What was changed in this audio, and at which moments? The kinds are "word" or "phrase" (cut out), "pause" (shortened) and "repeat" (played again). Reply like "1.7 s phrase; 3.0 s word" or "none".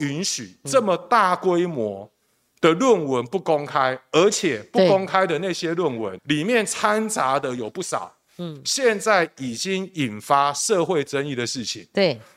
6.2 s word

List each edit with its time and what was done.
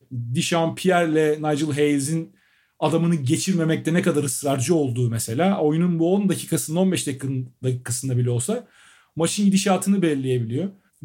none

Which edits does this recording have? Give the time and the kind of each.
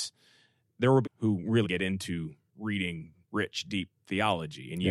1.0 s phrase; 1.6 s word; 3.2 s pause

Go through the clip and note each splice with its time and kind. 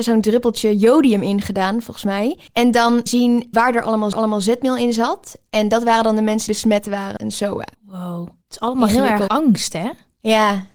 2.5 s pause; 3.1 s phrase; 3.5 s word; 4.1 s repeat; 6.5 s word; 7.2 s word; 7.7 s pause; 8.4 s pause; 9.3 s word

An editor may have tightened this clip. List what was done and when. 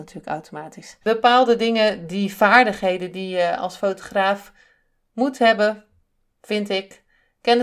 none

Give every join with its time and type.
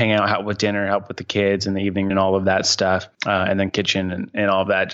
2.1 s word; 3.1 s pause; 3.7 s phrase

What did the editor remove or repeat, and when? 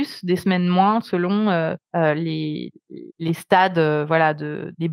1.8 s pause; 3.1 s pause

